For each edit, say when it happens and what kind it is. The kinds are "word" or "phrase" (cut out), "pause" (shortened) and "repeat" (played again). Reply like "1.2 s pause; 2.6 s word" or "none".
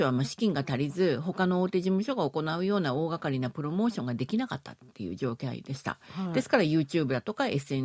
none